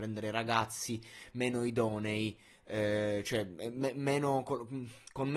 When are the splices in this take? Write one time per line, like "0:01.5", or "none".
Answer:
none

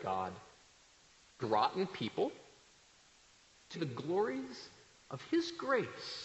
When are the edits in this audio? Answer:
0:01.4
0:03.7

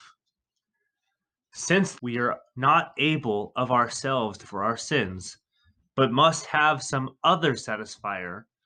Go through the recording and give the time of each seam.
0:02.0
0:04.4

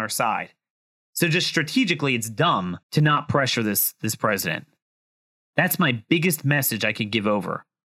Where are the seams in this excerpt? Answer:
0:02.8

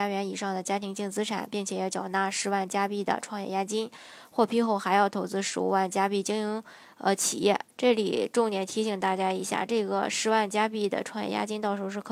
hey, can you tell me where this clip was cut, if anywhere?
0:07.7

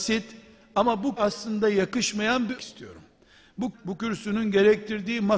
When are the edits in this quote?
0:01.2
0:02.6
0:03.7

